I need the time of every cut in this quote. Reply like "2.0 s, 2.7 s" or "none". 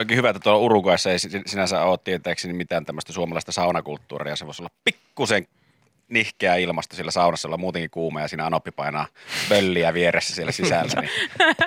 none

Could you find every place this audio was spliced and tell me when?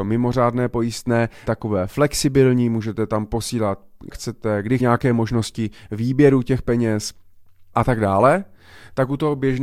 1.5 s, 4.1 s, 4.8 s, 7.7 s

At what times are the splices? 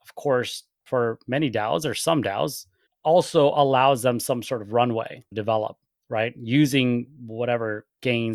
2.9 s, 5.3 s

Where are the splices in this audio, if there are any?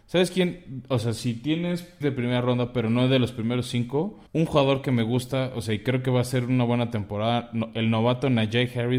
2.0 s, 4.3 s

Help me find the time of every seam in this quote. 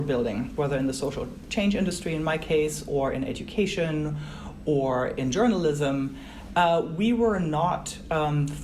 none

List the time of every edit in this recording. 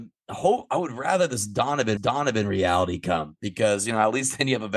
2.0 s

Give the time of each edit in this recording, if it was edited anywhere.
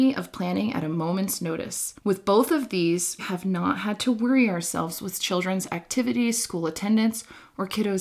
2.0 s, 3.2 s

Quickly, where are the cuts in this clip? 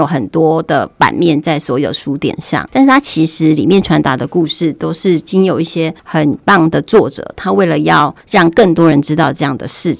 2.7 s, 6.0 s, 8.2 s

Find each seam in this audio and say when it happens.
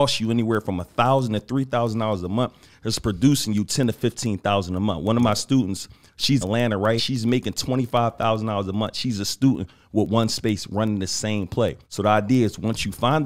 6.4 s, 7.0 s, 11.8 s

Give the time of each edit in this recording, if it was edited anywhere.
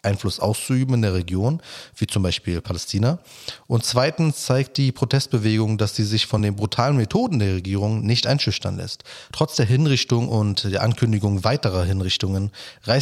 none

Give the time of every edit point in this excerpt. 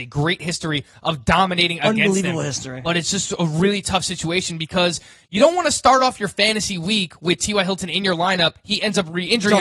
none

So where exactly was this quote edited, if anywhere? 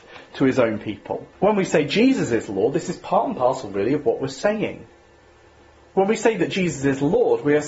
1.3 s

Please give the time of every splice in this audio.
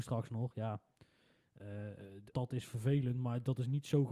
2.3 s

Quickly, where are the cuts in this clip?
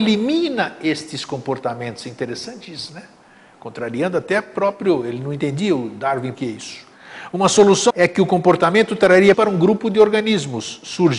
6.3 s, 7.9 s, 9.3 s

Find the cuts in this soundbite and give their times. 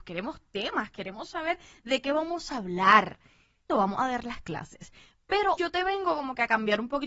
3.7 s, 5.6 s

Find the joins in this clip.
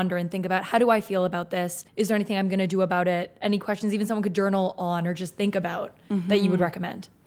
1.9 s

